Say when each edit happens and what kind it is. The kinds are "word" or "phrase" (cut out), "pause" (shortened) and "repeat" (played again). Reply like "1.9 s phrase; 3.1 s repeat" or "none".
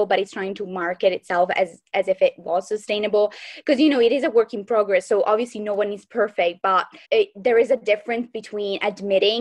7.0 s pause

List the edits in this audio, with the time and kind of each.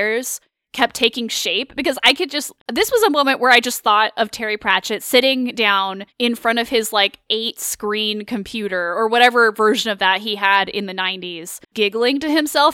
2.6 s pause; 6.1 s pause; 11.6 s pause

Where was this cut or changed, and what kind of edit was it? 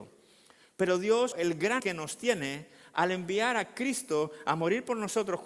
1.3 s word; 1.8 s word

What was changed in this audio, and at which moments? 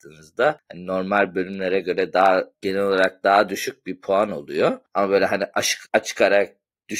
2.5 s pause; 5.9 s pause

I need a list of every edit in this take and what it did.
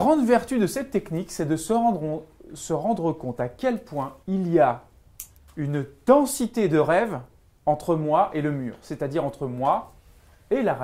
4.2 s pause; 5.4 s pause; 7.4 s pause

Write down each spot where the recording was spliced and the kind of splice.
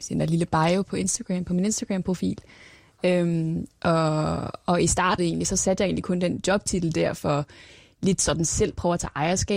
5.2 s word

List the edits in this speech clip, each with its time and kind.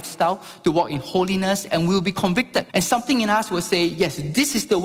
2.7 s pause

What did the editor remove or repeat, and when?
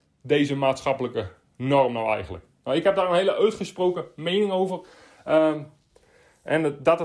none

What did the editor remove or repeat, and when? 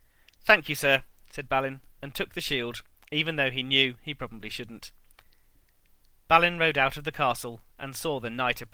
none

